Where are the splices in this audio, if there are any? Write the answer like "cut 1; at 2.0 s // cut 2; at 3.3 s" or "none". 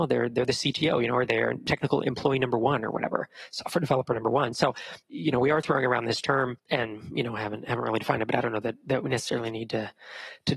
cut 1; at 6.6 s

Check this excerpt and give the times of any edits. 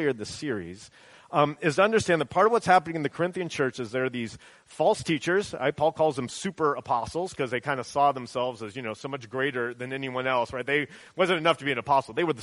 none

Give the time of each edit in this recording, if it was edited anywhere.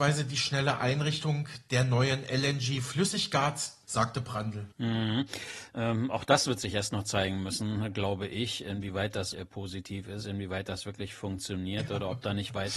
cut 1; at 3.8 s // cut 2; at 4.7 s // cut 3; at 9.3 s

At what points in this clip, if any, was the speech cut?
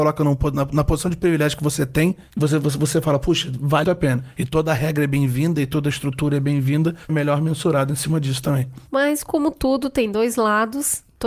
cut 1; at 3.8 s // cut 2; at 7.1 s

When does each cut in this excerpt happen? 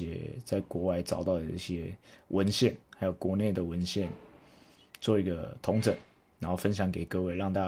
none

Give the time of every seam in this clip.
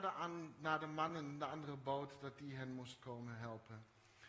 none

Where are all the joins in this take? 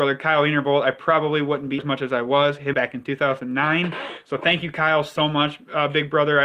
cut 1; at 1.8 s // cut 2; at 2.7 s

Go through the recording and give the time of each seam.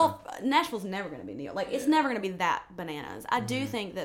none

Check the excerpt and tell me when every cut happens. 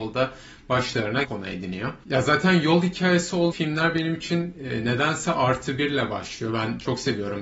cut 1; at 1.2 s // cut 2; at 3.5 s

